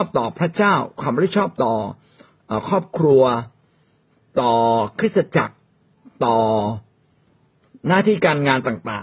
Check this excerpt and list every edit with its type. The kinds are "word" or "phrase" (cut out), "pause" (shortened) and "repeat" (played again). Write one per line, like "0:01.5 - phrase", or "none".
none